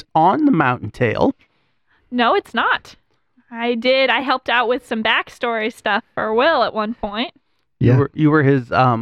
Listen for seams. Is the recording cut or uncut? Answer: uncut